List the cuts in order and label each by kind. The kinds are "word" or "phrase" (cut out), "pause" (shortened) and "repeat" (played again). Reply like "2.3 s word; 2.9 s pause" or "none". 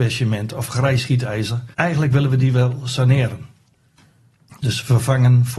1.7 s pause